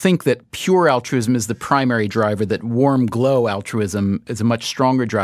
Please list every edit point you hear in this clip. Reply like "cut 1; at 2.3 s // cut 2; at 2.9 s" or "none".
none